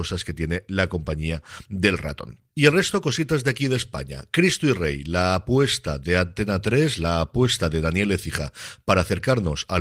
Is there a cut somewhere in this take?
no; 0 cuts

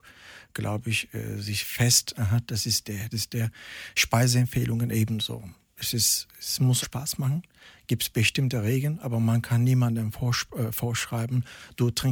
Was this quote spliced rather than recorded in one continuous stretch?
yes; 2 cuts; at 3.1 s, 6.8 s

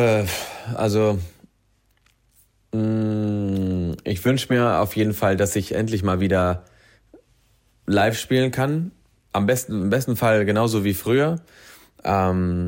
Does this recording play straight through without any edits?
yes; 0 cuts

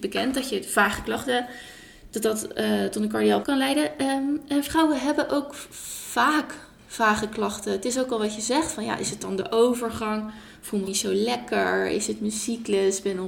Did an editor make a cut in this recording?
yes; 2 cuts; at 3.4 s, 10.9 s

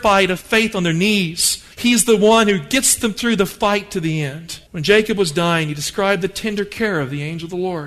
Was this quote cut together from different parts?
yes; 2 cuts; at 1.7 s, 4.7 s

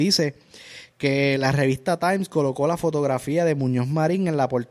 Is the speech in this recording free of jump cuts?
yes; 0 cuts

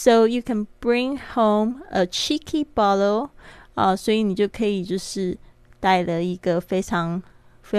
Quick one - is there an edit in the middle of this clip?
no; 0 cuts

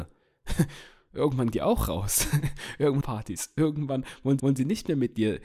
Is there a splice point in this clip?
yes; 3 cuts; at 1.5 s, 3.0 s, 4.4 s

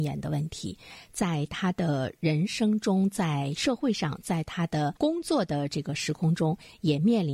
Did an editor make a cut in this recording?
yes; 1 cut; at 5.0 s

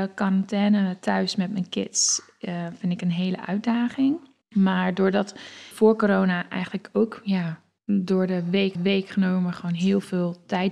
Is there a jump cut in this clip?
yes; 4 cuts; at 4.4 s, 5.7 s, 7.8 s, 8.7 s

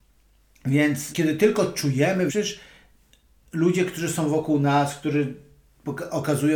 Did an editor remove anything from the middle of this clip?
yes; 2 cuts; at 1.1 s, 2.3 s

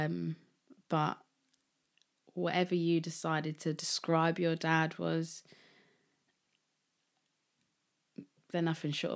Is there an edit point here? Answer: no; 0 cuts

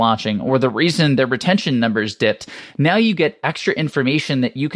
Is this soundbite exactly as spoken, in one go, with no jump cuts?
yes; 0 cuts

